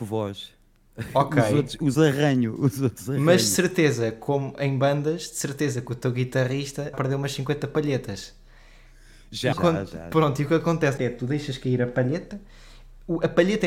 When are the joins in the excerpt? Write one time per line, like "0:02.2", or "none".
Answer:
0:01.9
0:06.9
0:09.5
0:11.0